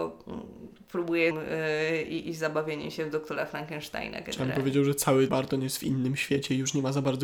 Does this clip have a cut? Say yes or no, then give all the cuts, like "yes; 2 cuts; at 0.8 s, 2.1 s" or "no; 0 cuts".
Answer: yes; 2 cuts; at 1.3 s, 5.3 s